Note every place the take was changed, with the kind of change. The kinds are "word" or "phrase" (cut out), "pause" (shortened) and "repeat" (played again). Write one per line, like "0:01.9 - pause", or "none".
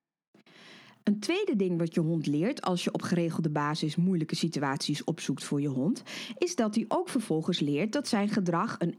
none